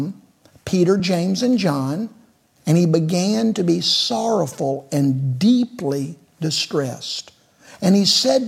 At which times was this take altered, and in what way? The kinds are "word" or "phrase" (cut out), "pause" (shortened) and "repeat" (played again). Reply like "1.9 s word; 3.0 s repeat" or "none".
none